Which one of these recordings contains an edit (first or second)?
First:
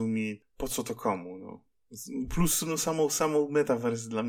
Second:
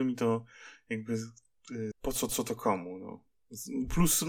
second